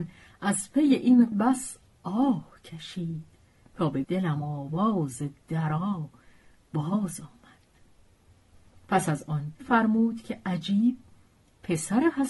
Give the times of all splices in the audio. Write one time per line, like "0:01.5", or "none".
0:01.3
0:04.0
0:09.6

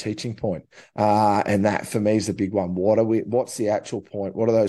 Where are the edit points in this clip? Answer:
none

